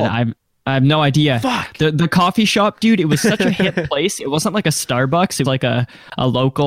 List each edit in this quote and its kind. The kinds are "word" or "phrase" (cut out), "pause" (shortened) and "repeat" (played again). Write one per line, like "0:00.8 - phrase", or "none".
0:05.4 - word